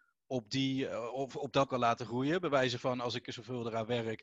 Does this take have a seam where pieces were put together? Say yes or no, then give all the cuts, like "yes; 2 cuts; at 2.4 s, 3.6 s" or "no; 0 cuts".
yes; 2 cuts; at 1.7 s, 3.2 s